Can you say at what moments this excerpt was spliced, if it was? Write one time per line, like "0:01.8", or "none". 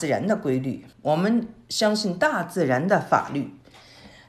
0:00.9